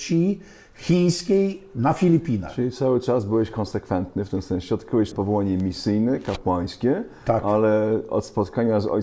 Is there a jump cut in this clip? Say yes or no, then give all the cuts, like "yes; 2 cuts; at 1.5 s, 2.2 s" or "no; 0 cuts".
yes; 1 cut; at 5.1 s